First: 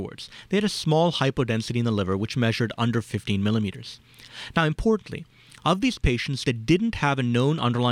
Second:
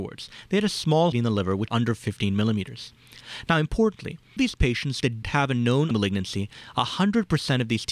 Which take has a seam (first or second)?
second